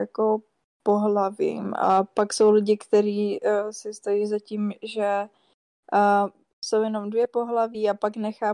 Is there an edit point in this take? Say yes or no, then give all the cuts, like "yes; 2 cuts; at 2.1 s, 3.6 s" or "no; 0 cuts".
no; 0 cuts